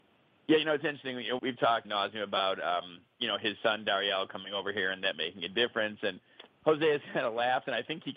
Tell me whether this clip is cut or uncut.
cut